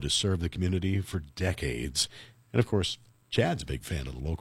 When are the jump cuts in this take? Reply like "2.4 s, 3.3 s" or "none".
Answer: none